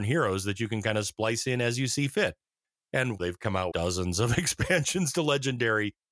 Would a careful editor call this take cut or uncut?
cut